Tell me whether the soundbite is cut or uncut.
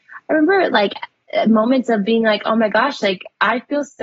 uncut